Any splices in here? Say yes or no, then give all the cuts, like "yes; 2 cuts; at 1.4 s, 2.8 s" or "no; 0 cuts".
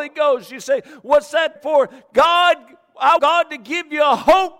yes; 2 cuts; at 1.6 s, 3.2 s